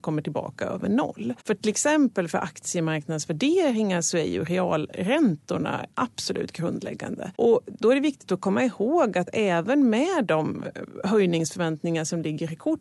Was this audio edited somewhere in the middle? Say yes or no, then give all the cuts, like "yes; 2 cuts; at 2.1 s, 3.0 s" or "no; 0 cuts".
yes; 3 cuts; at 1.4 s, 5.9 s, 7.3 s